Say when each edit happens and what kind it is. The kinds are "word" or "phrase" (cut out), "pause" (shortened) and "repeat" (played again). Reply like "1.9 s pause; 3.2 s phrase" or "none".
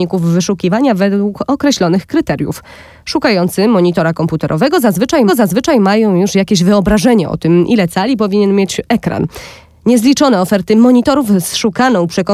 5.3 s repeat